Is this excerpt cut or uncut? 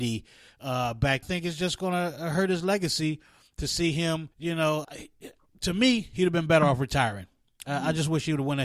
cut